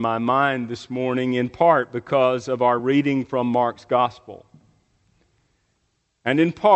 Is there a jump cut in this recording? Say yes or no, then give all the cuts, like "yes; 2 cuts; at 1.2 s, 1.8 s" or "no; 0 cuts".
no; 0 cuts